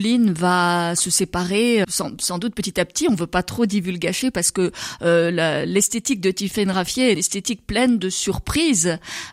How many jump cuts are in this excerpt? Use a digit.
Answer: 2